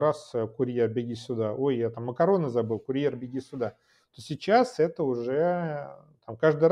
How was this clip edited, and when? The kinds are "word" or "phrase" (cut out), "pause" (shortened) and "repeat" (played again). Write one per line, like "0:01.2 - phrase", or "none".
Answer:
none